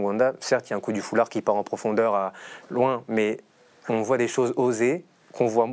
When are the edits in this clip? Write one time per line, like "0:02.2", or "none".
none